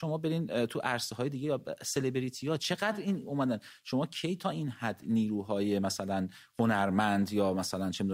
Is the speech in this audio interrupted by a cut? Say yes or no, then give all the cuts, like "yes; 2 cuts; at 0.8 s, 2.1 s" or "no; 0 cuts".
no; 0 cuts